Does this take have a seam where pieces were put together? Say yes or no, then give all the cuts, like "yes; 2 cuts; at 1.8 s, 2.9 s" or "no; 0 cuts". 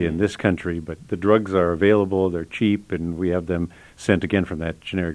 no; 0 cuts